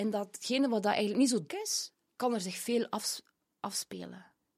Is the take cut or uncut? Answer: cut